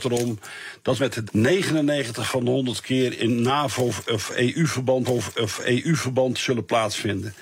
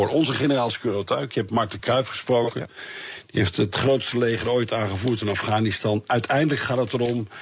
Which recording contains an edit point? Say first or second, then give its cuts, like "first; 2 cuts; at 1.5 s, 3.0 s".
first; 4 cuts; at 1.0 s, 1.3 s, 3.2 s, 5.0 s